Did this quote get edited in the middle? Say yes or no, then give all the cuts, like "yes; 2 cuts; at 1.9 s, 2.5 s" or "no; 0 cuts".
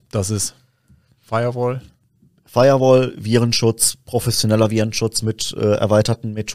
no; 0 cuts